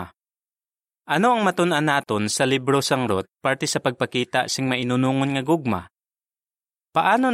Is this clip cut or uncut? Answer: uncut